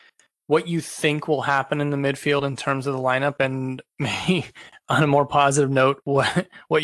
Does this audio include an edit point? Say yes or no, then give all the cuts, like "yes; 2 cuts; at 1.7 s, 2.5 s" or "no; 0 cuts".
no; 0 cuts